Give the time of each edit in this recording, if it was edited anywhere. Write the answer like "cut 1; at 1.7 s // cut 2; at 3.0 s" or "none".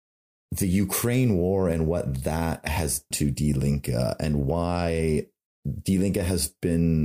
cut 1; at 3.1 s